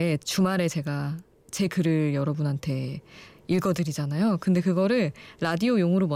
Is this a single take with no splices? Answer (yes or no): yes